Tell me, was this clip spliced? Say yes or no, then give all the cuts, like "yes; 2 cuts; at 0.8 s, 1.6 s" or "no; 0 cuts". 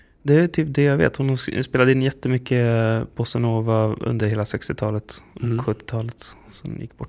no; 0 cuts